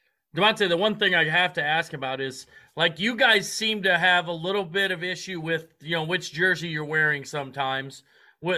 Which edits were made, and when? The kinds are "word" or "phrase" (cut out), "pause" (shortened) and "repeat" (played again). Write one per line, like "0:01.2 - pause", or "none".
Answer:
none